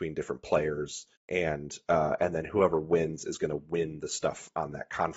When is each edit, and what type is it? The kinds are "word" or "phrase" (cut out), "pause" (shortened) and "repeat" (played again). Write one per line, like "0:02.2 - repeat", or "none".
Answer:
0:01.2 - pause